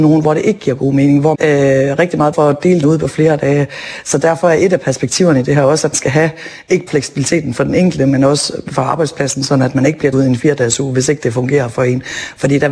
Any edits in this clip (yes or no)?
yes